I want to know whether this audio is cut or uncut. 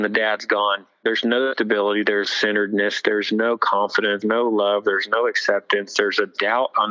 cut